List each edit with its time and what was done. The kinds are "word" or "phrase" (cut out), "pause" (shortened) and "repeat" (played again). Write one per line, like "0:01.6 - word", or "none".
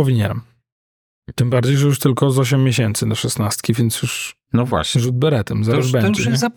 none